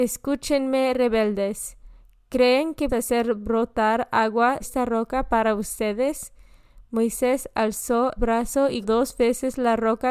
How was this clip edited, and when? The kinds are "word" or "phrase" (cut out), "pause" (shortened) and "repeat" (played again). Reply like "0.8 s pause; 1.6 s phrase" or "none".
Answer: 2.9 s word; 4.6 s word; 8.2 s word; 8.8 s word